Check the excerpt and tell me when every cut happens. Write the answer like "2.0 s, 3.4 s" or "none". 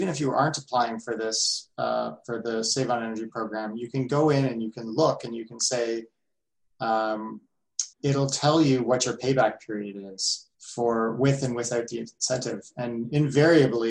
1.7 s, 7.9 s, 10.5 s